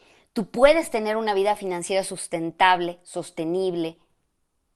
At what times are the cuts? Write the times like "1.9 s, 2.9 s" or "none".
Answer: none